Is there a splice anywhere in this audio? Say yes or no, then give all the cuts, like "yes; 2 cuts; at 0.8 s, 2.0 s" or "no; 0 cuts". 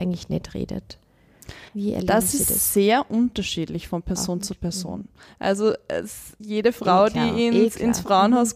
yes; 1 cut; at 1.7 s